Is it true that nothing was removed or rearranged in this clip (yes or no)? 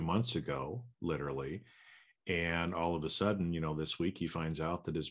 yes